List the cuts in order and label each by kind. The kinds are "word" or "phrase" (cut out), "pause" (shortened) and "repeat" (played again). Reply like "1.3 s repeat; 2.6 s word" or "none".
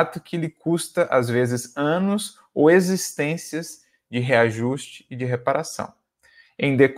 none